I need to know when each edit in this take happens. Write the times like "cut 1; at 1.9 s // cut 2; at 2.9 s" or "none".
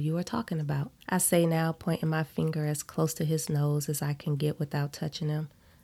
cut 1; at 1.0 s